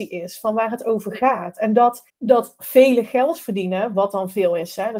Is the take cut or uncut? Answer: cut